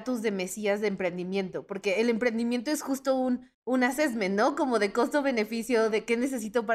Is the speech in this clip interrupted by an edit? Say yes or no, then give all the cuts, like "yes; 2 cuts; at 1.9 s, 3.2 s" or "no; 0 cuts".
yes; 1 cut; at 3.5 s